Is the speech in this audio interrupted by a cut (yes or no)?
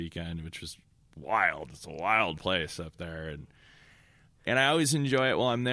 no